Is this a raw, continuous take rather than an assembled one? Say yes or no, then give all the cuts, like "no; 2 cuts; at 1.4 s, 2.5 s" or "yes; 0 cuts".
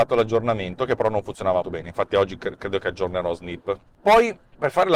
no; 1 cut; at 1.6 s